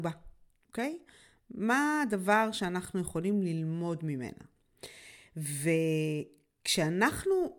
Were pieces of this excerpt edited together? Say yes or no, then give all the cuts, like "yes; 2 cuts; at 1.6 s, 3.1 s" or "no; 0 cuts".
no; 0 cuts